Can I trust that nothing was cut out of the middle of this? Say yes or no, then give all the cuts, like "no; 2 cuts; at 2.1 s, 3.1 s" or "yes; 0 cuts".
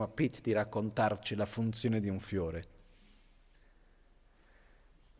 yes; 0 cuts